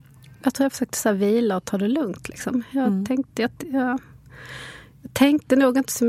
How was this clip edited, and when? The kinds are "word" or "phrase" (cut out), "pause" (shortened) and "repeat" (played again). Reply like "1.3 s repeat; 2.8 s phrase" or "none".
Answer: 3.6 s pause

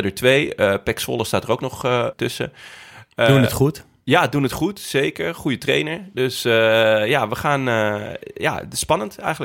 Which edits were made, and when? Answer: 2.1 s word

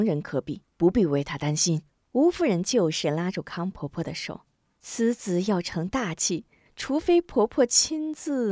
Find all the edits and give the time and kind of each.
1.9 s pause; 4.5 s pause; 6.7 s pause

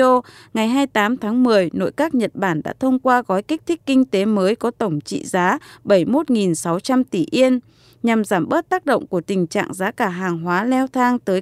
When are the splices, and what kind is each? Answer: none

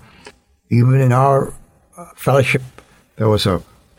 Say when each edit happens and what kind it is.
2.1 s pause

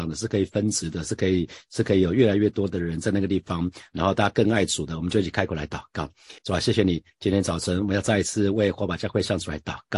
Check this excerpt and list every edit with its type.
6.4 s pause

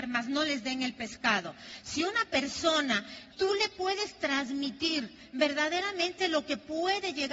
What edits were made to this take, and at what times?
3.3 s word

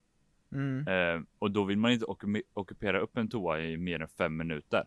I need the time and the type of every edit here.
none

